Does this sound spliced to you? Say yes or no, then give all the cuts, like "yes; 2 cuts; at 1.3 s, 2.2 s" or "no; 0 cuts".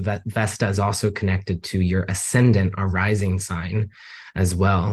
no; 0 cuts